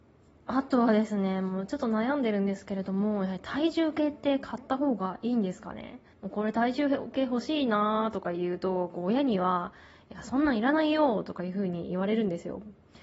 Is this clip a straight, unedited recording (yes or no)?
no